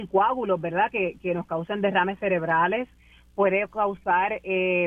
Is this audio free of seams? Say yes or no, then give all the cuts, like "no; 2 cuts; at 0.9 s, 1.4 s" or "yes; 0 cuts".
yes; 0 cuts